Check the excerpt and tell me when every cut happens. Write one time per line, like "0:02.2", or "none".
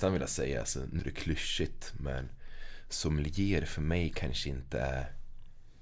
0:01.0